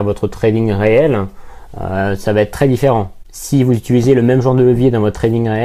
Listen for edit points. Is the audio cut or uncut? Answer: uncut